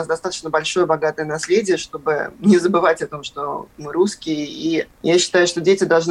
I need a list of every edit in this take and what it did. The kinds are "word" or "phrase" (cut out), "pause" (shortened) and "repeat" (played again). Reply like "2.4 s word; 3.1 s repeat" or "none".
4.9 s pause

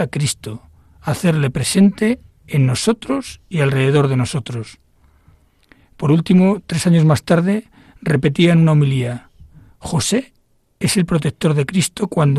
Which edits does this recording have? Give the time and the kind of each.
none

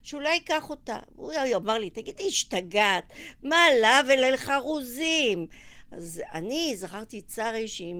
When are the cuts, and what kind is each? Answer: none

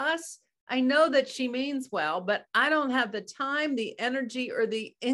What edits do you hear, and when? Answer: none

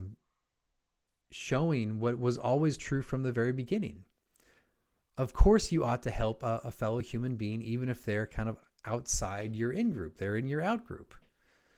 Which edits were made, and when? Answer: none

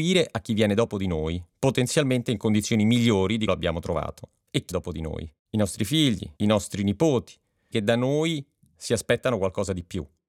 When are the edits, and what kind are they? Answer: 3.5 s word; 4.7 s word; 5.4 s pause; 6.4 s pause; 7.7 s phrase

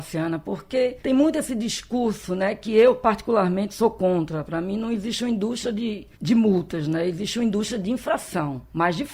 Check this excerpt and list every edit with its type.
1.0 s pause; 6.1 s pause

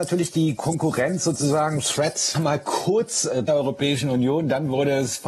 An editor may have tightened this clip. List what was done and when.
2.3 s phrase; 3.5 s phrase

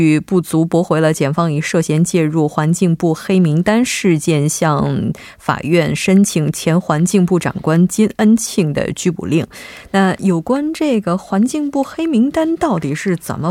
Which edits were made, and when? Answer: none

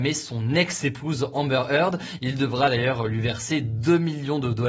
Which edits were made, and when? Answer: none

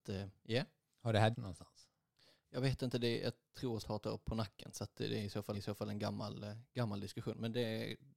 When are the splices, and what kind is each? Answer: 1.3 s word; 3.8 s word; 5.5 s repeat

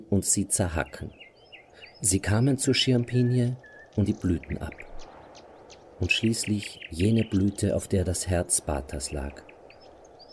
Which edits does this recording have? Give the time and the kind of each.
4.1 s word

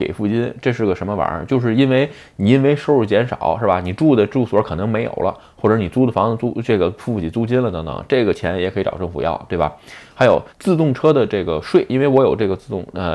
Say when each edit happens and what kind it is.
10.5 s pause

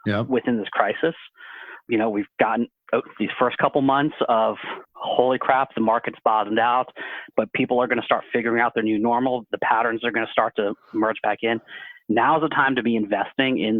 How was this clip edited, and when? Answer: 4.8 s pause

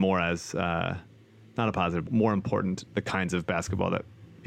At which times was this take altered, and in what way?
2.1 s word; 2.9 s word

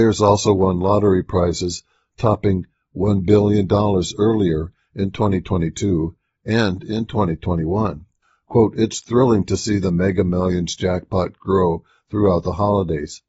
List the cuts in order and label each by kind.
none

